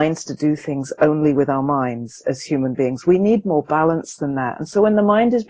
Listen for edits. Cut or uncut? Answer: uncut